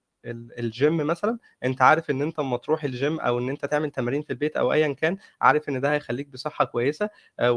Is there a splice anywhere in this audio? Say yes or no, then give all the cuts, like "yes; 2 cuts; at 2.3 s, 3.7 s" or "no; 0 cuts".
no; 0 cuts